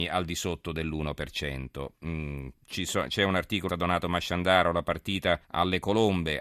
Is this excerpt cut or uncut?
cut